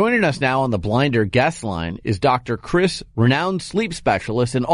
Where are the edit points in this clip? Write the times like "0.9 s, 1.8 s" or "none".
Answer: 3.1 s